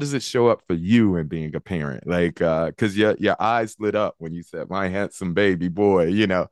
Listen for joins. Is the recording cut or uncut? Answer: uncut